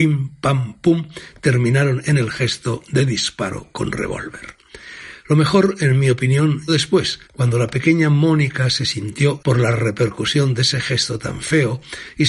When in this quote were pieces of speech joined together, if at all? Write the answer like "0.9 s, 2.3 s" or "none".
6.7 s, 7.2 s, 9.4 s